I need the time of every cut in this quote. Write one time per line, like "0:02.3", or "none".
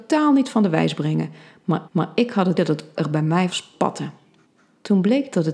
0:01.9
0:02.6
0:03.0
0:03.5
0:04.5